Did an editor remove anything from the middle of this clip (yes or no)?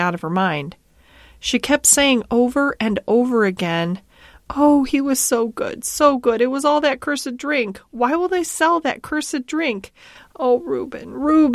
no